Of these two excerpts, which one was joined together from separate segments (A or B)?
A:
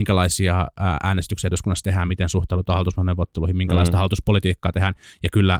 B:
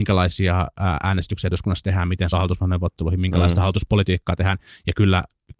B